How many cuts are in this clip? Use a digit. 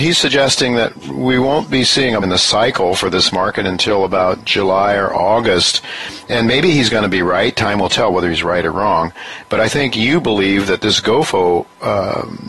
1